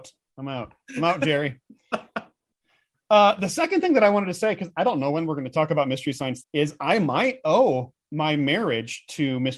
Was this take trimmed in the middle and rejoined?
yes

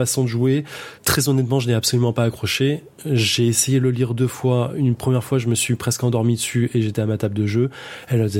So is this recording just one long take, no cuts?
no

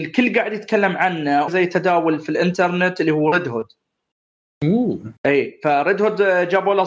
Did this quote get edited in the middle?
yes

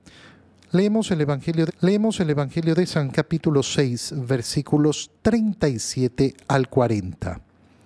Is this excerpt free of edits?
no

